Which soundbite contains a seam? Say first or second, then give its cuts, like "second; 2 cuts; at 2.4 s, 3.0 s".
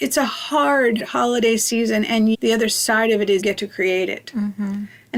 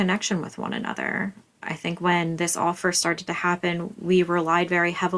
first; 3 cuts; at 1.0 s, 2.3 s, 3.4 s